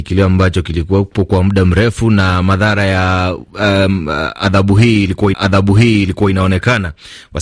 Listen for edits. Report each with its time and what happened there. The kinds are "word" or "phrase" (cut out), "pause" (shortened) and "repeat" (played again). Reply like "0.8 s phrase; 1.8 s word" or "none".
5.3 s repeat